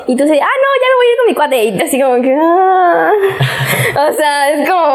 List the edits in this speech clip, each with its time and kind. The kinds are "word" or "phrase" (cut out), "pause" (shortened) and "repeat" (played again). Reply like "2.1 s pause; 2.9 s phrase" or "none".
1.8 s word